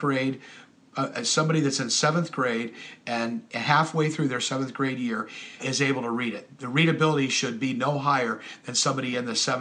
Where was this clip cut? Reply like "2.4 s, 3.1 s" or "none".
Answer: 5.6 s